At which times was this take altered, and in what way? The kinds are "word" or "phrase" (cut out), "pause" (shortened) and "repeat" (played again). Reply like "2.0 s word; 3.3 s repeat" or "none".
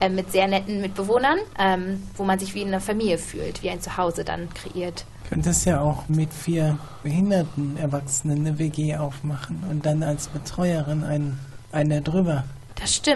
6.1 s word